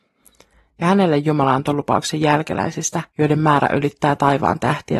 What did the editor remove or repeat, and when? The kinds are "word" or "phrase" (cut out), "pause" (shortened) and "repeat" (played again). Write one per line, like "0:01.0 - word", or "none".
0:03.1 - pause